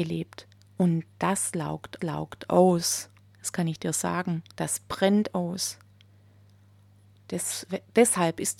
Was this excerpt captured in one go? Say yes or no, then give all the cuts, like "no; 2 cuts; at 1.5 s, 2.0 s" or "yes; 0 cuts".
no; 2 cuts; at 2.0 s, 4.5 s